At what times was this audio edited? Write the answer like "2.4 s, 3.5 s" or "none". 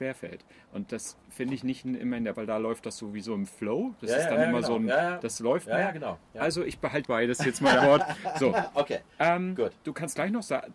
2.3 s, 6.2 s, 7.0 s, 7.8 s